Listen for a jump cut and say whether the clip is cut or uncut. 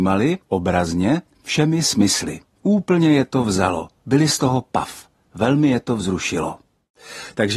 uncut